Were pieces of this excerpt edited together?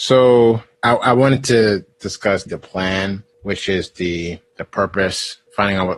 yes; 1 cut; at 2.5 s

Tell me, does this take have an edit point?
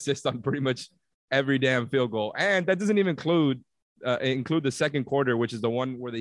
no; 0 cuts

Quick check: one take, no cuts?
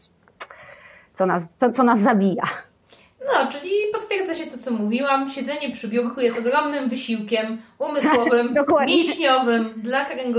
yes; 0 cuts

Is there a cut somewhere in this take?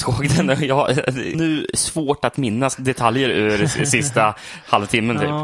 yes; 1 cut; at 1.3 s

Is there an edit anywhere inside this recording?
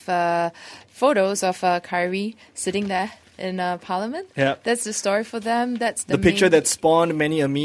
no; 0 cuts

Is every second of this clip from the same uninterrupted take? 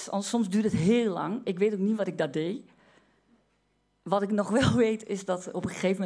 yes; 0 cuts

